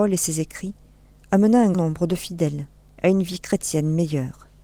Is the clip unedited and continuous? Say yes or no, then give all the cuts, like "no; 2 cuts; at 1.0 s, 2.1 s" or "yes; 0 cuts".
no; 1 cut; at 1.7 s